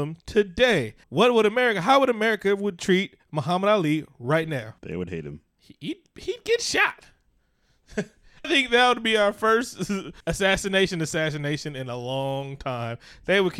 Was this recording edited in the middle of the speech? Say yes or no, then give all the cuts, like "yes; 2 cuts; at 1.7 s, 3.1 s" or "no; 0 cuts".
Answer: yes; 4 cuts; at 1.0 s, 4.8 s, 8.4 s, 10.2 s